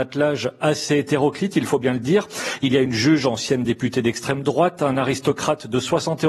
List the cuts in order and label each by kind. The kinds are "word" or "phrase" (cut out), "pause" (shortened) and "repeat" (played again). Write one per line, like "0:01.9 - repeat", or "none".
none